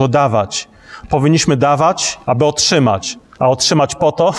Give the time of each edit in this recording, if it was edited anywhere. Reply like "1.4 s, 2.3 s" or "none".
2.2 s, 3.2 s